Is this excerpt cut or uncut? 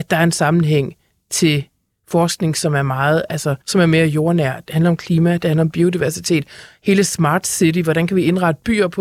cut